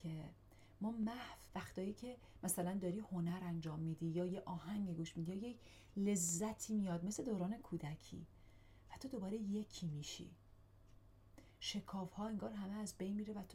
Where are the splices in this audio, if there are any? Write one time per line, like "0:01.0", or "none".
0:01.5